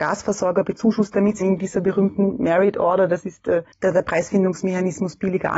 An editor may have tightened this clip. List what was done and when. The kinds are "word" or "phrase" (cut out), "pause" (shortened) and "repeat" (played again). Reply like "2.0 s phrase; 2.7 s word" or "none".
1.4 s word; 3.7 s pause